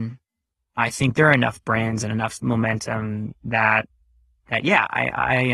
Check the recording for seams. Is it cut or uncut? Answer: uncut